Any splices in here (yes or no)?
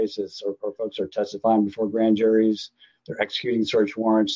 no